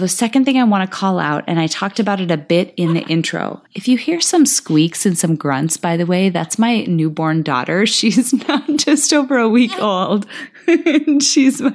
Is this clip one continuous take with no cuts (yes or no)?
no